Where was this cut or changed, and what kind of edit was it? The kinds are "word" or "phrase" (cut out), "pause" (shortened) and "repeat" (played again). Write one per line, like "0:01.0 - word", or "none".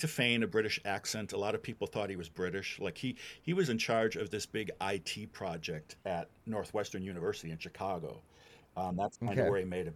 none